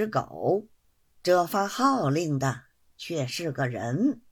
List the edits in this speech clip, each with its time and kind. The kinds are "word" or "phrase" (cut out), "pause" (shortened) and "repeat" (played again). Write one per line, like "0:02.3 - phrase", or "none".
0:01.0 - pause